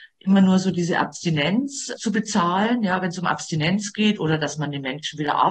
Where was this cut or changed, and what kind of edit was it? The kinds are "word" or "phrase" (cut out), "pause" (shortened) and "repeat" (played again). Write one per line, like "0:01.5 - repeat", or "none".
0:02.0 - word